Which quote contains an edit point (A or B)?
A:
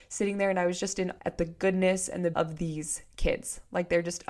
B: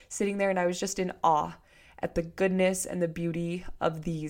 A